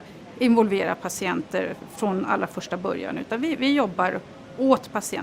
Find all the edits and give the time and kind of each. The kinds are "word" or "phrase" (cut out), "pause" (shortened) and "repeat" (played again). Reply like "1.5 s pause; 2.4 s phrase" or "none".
none